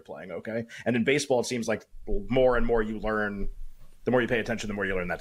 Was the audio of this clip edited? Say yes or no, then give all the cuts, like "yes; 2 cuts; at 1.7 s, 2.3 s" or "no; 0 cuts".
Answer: no; 0 cuts